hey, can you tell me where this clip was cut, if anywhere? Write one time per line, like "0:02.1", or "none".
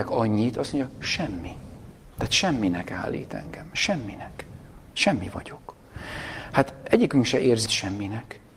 0:07.7